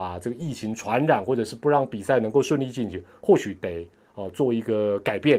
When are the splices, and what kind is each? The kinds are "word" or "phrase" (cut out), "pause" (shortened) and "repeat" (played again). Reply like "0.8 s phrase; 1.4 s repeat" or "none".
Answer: none